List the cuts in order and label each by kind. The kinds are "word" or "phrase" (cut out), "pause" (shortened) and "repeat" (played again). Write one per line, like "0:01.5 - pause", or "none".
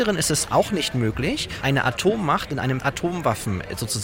0:01.6 - word
0:02.8 - word